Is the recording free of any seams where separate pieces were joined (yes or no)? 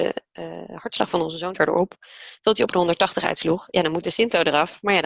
no